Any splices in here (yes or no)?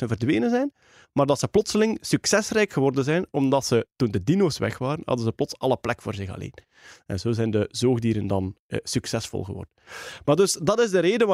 no